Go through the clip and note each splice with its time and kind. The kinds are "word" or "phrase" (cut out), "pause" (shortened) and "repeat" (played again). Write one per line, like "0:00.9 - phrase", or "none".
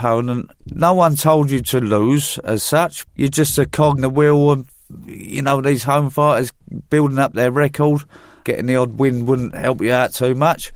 0:03.1 - word
0:04.0 - word